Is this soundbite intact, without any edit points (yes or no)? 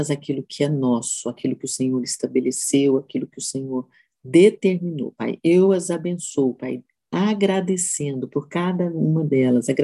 yes